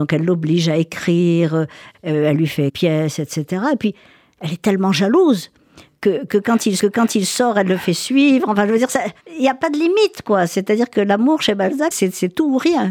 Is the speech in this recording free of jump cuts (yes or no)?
no